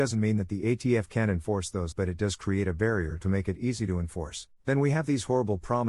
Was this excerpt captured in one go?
no; 2 cuts; at 1.9 s, 4.5 s

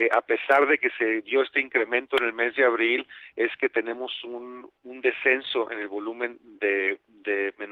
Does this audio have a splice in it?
no; 0 cuts

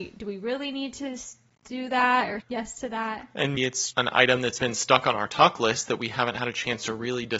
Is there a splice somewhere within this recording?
yes; 3 cuts; at 2.4 s, 3.6 s, 3.9 s

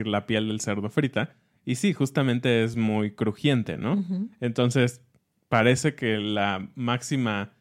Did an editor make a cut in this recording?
no; 0 cuts

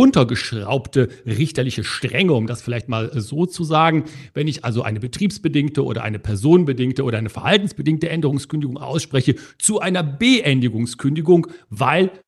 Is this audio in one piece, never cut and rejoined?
yes; 0 cuts

